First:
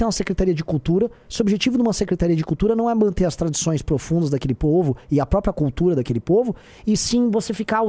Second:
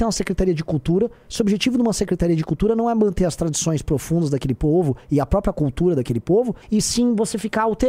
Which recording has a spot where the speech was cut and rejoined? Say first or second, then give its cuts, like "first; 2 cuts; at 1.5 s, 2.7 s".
second; 1 cut; at 6.6 s